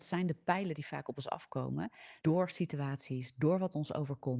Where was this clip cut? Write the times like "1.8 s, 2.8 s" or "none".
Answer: 2.2 s